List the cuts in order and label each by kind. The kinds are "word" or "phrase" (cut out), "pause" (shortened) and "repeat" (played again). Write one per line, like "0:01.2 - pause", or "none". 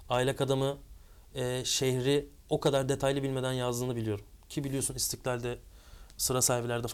none